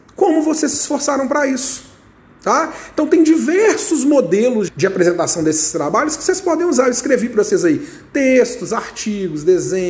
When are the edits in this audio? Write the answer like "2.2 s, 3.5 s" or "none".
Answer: 4.7 s